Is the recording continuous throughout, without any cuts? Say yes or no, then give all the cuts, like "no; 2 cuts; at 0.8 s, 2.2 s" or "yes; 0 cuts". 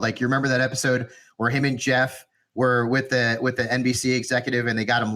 yes; 0 cuts